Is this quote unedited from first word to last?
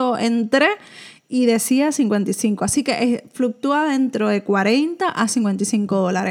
yes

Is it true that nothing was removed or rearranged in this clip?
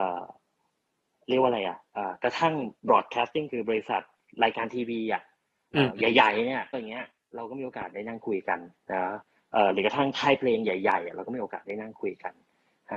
no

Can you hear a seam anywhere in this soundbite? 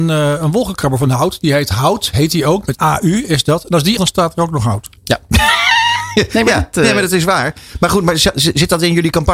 yes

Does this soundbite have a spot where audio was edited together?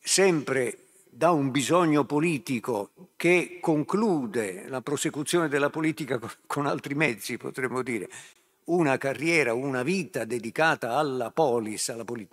yes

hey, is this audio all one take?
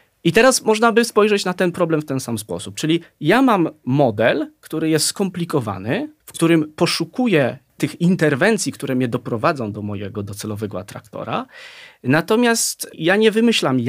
no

